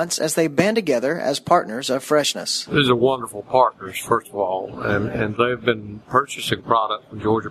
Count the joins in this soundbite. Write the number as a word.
zero